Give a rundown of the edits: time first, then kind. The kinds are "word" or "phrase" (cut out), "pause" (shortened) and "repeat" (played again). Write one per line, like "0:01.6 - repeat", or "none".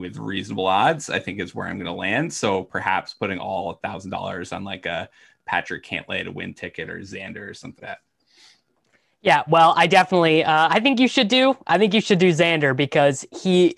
0:07.8 - word